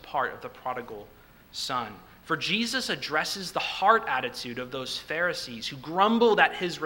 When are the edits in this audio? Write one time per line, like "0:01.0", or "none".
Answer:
none